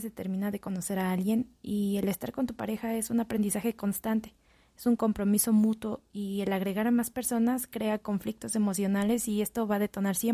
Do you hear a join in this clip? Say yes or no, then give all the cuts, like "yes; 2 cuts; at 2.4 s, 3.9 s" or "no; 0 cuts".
no; 0 cuts